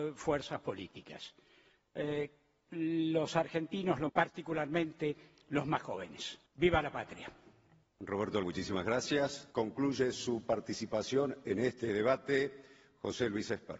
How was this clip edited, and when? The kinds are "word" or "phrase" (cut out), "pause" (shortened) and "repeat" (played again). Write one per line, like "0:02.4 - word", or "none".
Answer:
0:02.7 - word
0:04.1 - word
0:06.5 - pause
0:08.4 - word
0:09.5 - pause